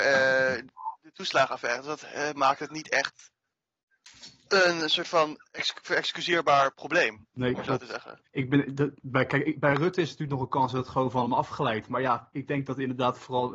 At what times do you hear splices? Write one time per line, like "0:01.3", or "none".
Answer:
0:08.3